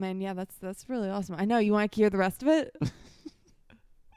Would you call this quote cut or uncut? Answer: uncut